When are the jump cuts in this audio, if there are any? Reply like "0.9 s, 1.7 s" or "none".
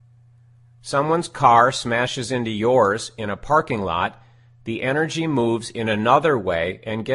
none